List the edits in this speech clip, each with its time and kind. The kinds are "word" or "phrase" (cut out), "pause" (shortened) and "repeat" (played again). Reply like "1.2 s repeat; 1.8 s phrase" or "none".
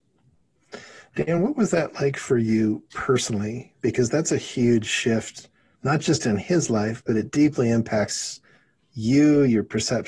none